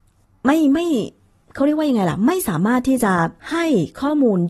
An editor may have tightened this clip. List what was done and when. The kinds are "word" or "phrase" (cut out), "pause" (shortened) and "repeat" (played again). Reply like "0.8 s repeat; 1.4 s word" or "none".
3.4 s pause

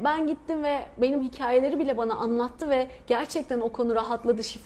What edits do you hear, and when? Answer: 1.2 s word

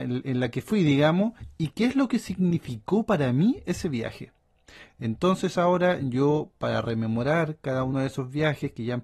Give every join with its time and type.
none

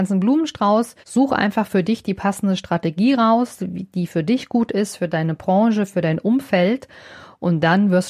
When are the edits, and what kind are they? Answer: 1.0 s pause

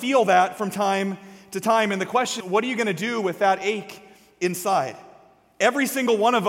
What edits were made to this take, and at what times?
2.4 s word

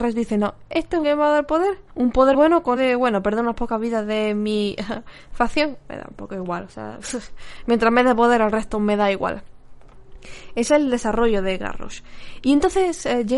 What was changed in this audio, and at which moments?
1.0 s phrase; 1.9 s pause; 2.3 s word; 2.8 s phrase

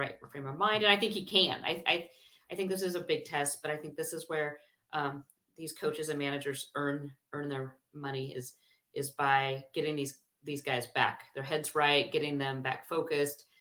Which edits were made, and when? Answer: none

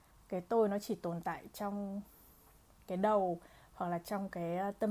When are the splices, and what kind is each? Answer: none

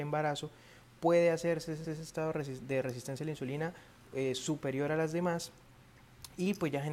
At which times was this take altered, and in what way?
1.8 s repeat

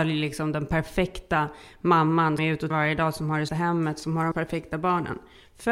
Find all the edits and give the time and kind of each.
2.4 s word; 2.7 s word; 3.5 s word; 4.3 s word

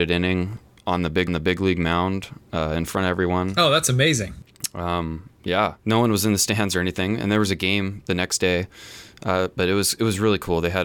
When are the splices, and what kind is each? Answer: 1.3 s repeat; 5.8 s pause

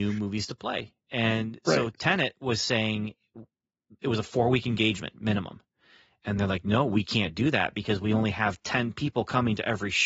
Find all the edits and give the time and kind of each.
none

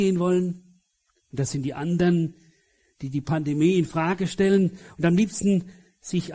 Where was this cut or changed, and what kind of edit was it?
none

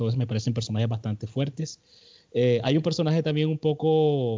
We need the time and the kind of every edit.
none

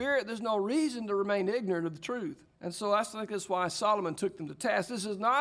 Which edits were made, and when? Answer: 2.5 s pause

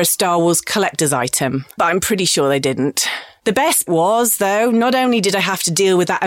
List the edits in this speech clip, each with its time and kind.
1.8 s word; 3.9 s word

